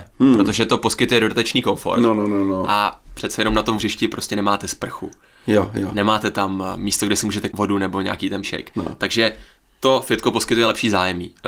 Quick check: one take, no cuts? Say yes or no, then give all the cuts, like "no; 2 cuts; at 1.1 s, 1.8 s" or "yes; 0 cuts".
no; 3 cuts; at 3.8 s, 7.5 s, 8.4 s